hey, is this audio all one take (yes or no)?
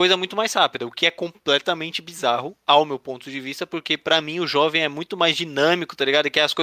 yes